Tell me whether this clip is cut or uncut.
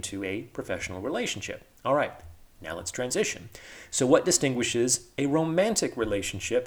uncut